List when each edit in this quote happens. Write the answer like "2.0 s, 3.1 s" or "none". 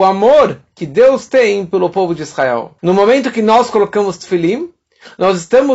2.8 s